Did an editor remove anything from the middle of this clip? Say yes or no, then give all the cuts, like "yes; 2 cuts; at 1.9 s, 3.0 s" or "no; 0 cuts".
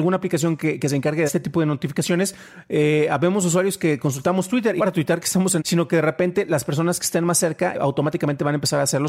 yes; 4 cuts; at 1.3 s, 4.8 s, 5.6 s, 7.7 s